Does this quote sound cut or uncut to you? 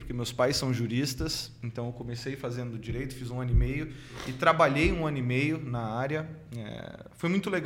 uncut